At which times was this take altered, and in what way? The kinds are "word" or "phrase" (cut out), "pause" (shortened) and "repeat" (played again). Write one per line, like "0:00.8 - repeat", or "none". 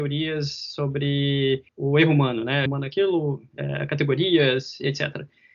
0:01.7 - pause
0:02.7 - phrase